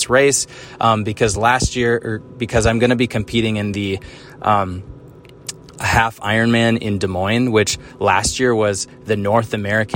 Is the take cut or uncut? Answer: uncut